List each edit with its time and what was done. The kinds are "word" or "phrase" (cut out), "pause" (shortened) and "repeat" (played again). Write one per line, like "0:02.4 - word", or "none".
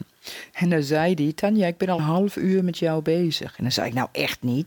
0:02.0 - word